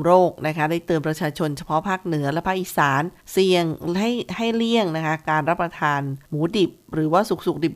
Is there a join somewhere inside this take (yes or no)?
yes